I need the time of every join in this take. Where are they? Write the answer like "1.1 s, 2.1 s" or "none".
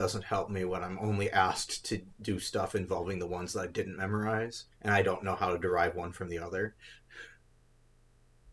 4.7 s